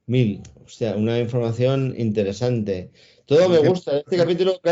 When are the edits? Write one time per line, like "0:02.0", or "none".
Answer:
none

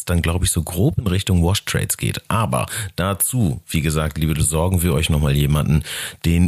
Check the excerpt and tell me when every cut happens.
0:04.3

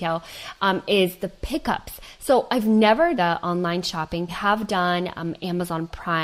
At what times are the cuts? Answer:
0:03.2
0:04.3

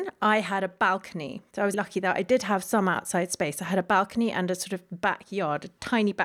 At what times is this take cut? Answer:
0:01.7

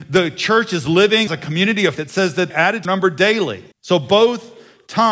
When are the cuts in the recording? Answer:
0:01.3
0:02.0
0:02.5
0:02.8
0:03.7

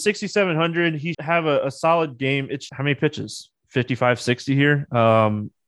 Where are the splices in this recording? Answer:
0:01.1
0:02.7

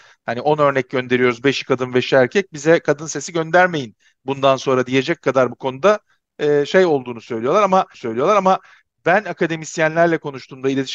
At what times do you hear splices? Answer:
0:07.9

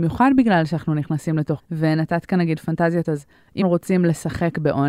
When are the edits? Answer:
0:01.6
0:03.0
0:03.6

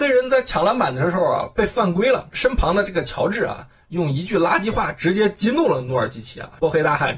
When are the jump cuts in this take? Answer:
none

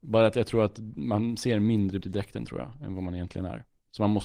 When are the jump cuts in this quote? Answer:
0:02.0

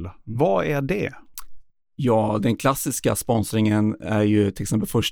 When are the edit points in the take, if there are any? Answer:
none

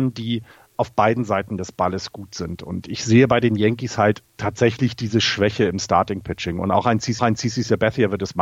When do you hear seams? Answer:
0:04.3
0:07.2

